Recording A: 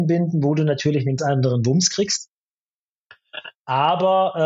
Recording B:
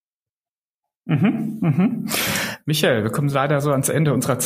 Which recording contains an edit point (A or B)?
A